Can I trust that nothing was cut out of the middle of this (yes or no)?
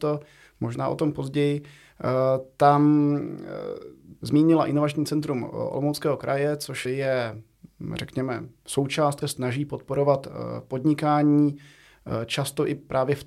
no